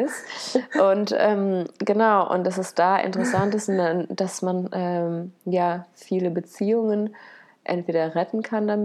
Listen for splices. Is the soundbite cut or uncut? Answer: uncut